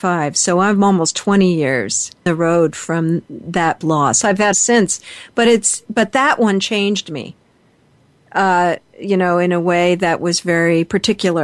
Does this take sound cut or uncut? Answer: cut